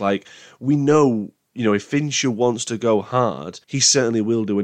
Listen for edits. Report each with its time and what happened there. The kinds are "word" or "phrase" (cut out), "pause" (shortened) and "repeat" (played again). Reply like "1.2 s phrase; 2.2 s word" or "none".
3.6 s pause